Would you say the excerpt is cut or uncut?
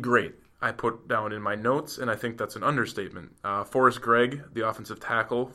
uncut